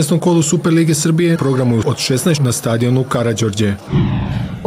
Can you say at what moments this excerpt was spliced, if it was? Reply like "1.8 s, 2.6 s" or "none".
1.4 s, 1.8 s, 2.4 s